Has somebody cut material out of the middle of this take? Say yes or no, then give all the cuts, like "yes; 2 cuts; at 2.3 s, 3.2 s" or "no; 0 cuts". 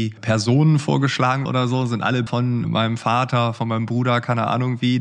yes; 3 cuts; at 1.5 s, 2.3 s, 2.6 s